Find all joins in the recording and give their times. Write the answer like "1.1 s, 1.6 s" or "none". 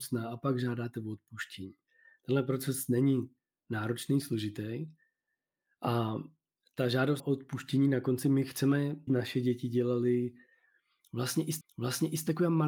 7.2 s, 9.1 s, 11.6 s